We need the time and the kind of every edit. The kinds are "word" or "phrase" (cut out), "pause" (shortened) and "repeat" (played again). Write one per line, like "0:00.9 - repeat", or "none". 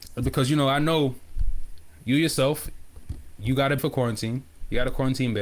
0:03.8 - word